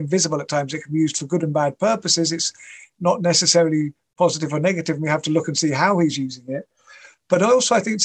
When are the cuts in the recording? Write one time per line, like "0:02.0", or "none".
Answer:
none